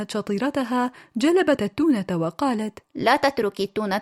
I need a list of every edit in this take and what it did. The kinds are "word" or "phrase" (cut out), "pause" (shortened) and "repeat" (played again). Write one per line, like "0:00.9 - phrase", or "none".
0:01.6 - word
0:02.9 - pause